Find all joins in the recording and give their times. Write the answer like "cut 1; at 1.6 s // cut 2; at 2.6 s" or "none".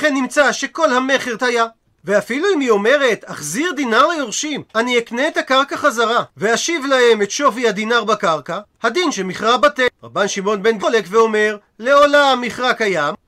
cut 1; at 1.4 s // cut 2; at 4.7 s // cut 3; at 6.3 s // cut 4; at 10.8 s